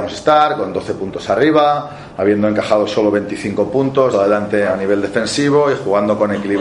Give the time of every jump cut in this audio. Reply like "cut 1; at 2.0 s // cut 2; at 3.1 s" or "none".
cut 1; at 4.1 s